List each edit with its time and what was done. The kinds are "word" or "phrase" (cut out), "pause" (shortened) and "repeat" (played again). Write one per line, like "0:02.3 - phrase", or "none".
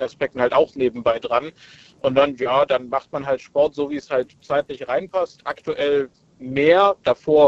none